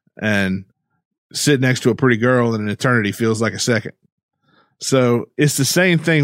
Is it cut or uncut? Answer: uncut